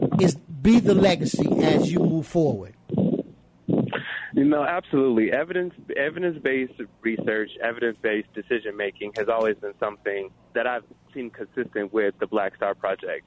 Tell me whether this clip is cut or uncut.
uncut